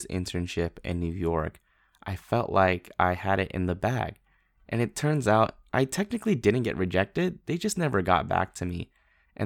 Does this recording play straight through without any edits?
yes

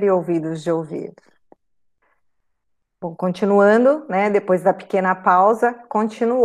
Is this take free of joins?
yes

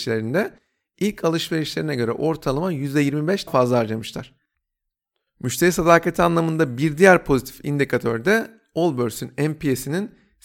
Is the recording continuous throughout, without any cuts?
no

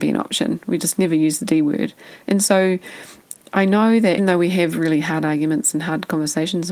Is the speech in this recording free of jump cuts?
no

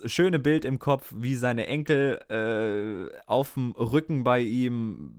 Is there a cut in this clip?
no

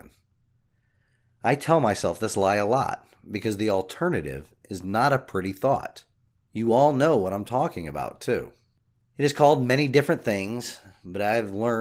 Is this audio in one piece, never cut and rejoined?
yes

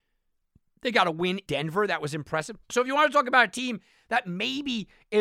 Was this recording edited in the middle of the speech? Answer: yes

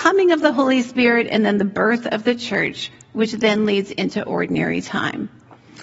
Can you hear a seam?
no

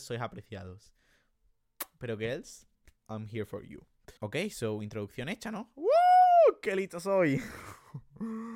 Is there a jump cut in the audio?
yes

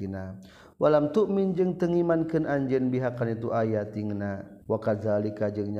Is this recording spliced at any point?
yes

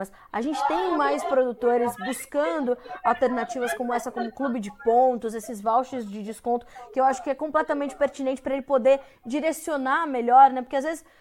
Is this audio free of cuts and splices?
yes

